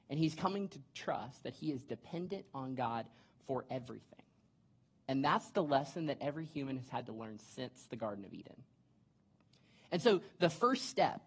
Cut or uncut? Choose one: uncut